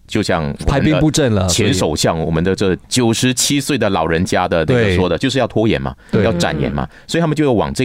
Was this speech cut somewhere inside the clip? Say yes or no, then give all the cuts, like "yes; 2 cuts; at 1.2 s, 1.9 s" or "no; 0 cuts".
yes; 1 cut; at 2.8 s